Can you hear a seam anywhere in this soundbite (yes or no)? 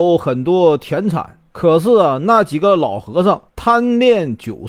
yes